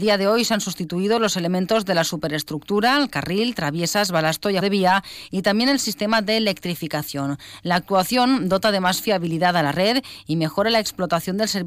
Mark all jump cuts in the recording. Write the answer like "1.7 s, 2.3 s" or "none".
4.6 s